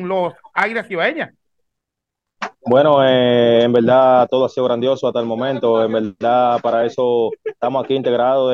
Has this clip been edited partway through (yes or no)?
no